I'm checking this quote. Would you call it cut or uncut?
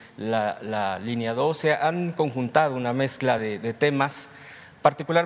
uncut